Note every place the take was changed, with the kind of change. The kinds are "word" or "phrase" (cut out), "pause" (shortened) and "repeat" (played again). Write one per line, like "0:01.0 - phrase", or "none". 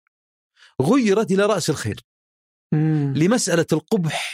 none